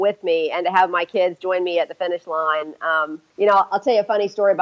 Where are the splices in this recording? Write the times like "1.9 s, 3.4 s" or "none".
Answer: 3.3 s